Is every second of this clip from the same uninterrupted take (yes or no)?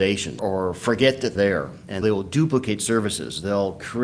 no